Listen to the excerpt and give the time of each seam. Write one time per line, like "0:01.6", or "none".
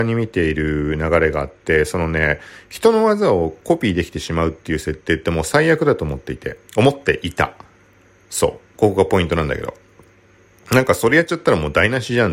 0:06.7